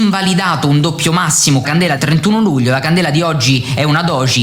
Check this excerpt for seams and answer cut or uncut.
cut